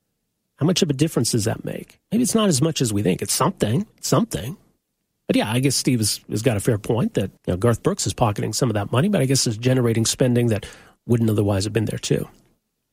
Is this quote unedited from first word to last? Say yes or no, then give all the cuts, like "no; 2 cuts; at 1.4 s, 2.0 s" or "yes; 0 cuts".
no; 3 cuts; at 2.0 s, 3.9 s, 7.4 s